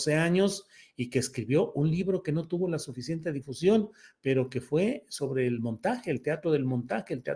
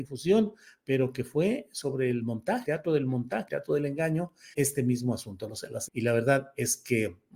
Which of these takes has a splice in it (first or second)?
second